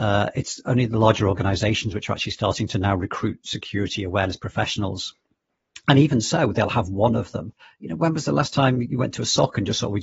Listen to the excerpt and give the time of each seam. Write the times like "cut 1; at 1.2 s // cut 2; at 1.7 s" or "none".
cut 1; at 7.6 s